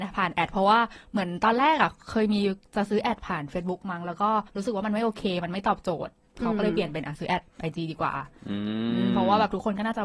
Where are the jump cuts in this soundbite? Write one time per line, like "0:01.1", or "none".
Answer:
0:04.5